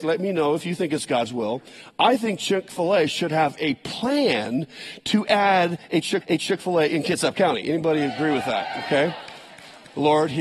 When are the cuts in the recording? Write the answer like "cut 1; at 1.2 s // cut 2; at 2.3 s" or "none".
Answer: cut 1; at 6.2 s